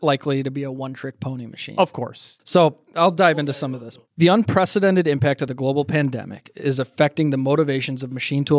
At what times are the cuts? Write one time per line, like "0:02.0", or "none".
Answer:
none